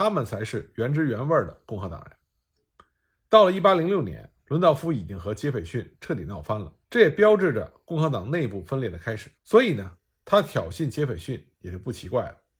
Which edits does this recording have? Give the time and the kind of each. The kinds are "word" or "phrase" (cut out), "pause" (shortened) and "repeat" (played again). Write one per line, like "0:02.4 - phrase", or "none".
0:04.4 - pause
0:06.8 - pause
0:09.4 - pause